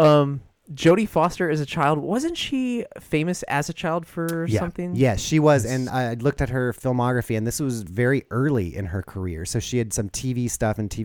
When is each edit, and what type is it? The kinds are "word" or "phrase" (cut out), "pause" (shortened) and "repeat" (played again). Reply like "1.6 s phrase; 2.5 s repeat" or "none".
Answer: 5.9 s word; 9.9 s word